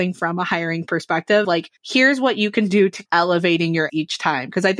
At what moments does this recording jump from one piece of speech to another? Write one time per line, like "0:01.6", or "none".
0:01.4
0:01.8
0:03.1
0:03.9